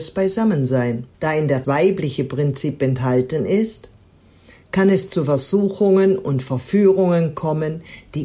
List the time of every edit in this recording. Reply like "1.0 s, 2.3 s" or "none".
1.1 s, 1.6 s